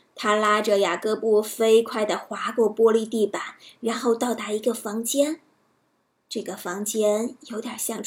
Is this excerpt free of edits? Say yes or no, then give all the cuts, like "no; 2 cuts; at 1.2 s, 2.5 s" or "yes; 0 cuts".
yes; 0 cuts